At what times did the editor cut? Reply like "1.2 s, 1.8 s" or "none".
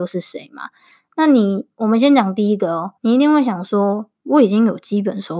3.0 s